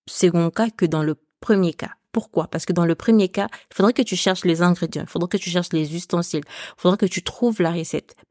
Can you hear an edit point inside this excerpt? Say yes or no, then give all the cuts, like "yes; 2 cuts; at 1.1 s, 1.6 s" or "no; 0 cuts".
no; 0 cuts